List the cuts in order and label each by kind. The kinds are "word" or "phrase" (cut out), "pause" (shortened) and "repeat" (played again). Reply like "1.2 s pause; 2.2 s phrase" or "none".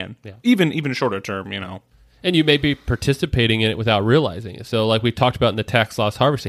none